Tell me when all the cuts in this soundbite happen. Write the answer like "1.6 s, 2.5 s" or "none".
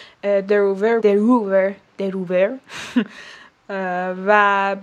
1.0 s, 1.9 s